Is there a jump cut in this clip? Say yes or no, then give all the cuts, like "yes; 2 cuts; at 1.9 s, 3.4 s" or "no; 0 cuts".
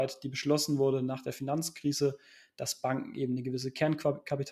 no; 0 cuts